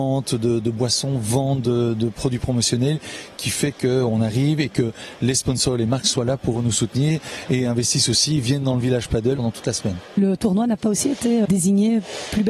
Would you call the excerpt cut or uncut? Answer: cut